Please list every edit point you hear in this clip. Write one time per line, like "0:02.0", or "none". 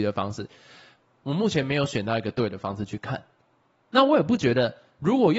none